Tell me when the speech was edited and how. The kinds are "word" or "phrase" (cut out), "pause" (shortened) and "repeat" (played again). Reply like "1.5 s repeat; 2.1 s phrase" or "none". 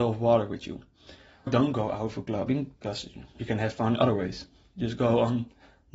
1.5 s word; 2.8 s pause